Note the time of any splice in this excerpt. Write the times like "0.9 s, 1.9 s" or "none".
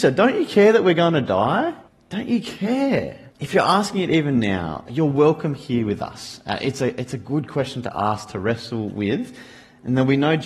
1.9 s, 3.3 s